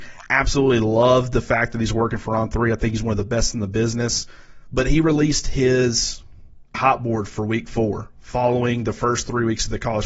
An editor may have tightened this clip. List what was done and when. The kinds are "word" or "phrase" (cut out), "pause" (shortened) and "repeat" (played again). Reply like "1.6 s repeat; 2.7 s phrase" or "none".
6.7 s word